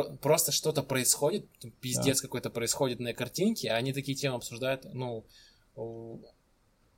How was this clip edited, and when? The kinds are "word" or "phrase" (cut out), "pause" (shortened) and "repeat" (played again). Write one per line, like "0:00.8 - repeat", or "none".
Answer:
none